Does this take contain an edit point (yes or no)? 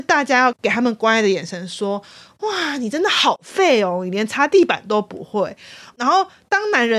no